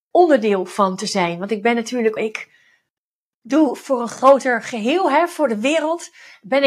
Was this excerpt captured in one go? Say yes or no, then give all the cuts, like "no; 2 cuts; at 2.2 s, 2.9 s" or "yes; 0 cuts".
no; 2 cuts; at 2.2 s, 3.5 s